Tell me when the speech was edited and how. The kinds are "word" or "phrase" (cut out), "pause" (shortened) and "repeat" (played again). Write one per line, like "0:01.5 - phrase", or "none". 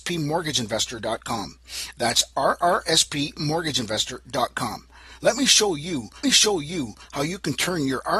0:06.2 - repeat